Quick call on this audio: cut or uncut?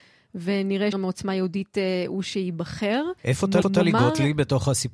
cut